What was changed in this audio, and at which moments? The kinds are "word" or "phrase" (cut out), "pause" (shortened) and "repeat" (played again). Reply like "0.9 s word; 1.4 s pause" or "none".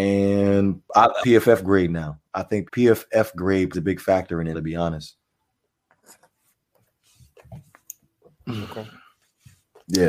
1.2 s word; 2.7 s word; 3.7 s word; 4.5 s word